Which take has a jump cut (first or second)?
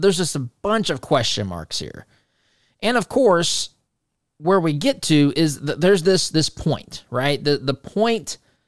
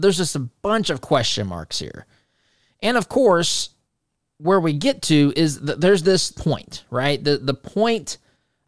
second